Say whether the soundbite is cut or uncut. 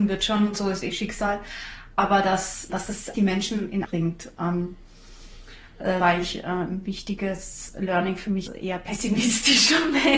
cut